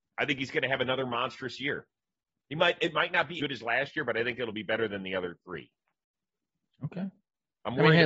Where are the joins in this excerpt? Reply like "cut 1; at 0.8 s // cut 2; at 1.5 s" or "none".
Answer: cut 1; at 3.4 s